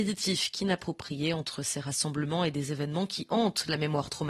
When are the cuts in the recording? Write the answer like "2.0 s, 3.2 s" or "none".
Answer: none

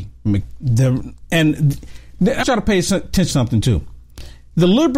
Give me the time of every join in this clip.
2.4 s, 3.3 s

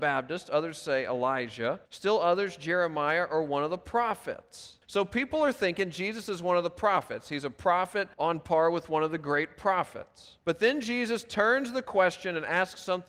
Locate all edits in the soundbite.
1.9 s, 4.8 s, 8.1 s, 10.4 s

